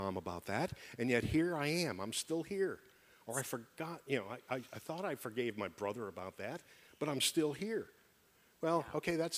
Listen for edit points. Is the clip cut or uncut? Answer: uncut